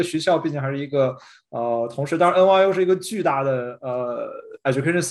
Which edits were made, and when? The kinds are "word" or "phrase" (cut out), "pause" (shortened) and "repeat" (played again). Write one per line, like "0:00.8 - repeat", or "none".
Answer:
none

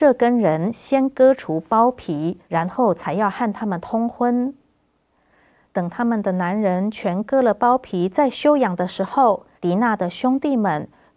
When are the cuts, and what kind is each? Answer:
0:02.4 - pause
0:09.6 - pause

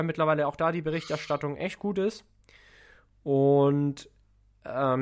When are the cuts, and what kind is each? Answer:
none

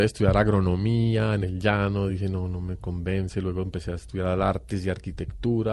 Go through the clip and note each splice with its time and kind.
none

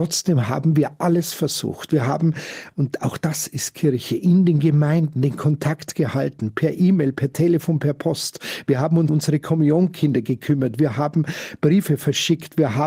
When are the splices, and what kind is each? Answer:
0:09.1 - word

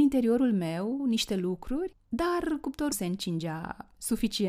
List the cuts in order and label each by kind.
0:01.0 - word
0:02.9 - word

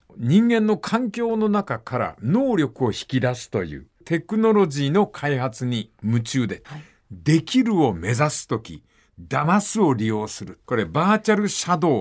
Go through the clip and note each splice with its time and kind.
none

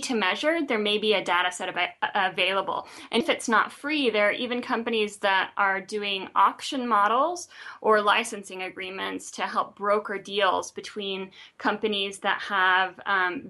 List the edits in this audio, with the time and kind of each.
0:03.2 - word

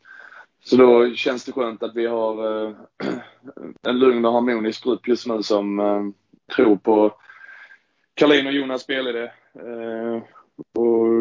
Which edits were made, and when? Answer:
0:03.8 - pause
0:06.4 - pause

